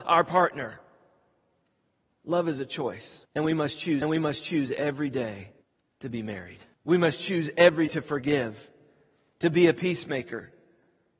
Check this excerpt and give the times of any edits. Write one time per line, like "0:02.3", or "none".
0:03.3
0:04.0
0:05.6
0:06.7
0:07.9